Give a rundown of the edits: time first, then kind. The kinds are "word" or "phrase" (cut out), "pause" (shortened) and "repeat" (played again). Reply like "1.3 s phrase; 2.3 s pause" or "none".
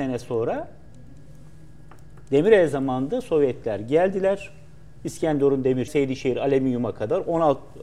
5.9 s word